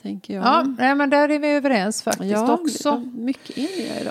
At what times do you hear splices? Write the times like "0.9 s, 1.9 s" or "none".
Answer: none